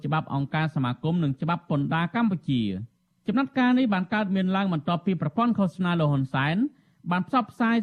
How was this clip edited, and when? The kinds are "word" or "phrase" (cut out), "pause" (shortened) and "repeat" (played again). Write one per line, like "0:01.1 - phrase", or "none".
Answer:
none